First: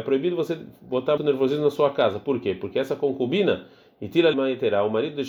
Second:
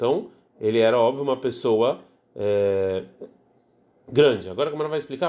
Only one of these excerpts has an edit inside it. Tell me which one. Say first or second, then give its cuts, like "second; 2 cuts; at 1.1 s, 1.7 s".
first; 2 cuts; at 1.2 s, 4.3 s